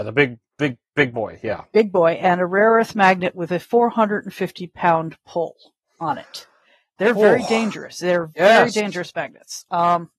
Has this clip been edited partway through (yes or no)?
no